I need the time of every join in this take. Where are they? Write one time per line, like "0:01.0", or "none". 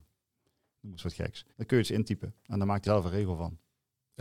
0:01.5
0:02.8